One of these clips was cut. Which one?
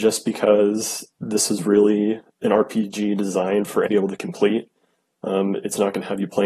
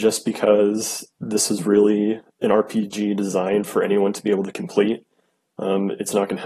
first; 1 cut; at 3.9 s

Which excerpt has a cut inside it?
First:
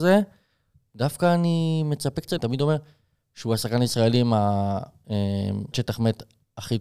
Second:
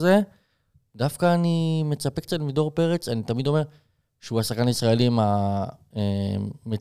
first; 2 cuts; at 2.4 s, 5.7 s

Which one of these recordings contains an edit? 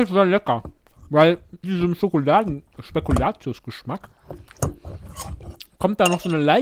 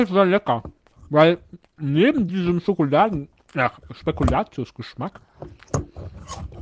first; 2 cuts; at 1.6 s, 2.8 s

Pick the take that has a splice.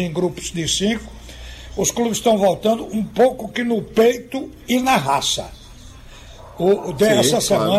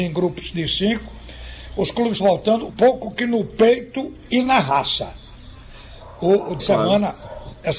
second; 3 cuts; at 2.2 s, 2.7 s, 6.6 s

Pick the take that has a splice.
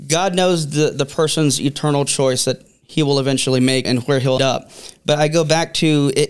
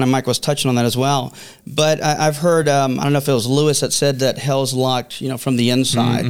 first; 2 cuts; at 3.8 s, 4.4 s

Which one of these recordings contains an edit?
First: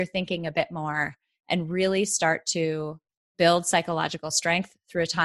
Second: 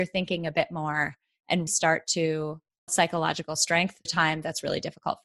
second; 3 cuts; at 1.7 s, 2.9 s, 4.1 s

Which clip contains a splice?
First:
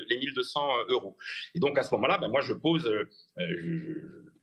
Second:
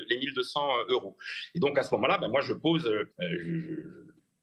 second; 1 cut; at 3.1 s

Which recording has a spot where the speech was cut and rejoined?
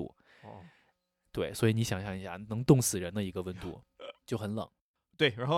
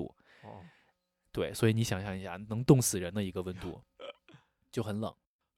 first; 1 cut; at 4.2 s

